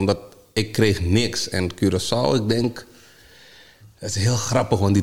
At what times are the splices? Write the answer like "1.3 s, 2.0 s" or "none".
none